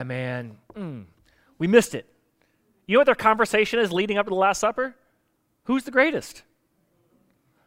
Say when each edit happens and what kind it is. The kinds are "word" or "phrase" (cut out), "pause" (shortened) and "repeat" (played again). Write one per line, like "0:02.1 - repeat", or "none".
none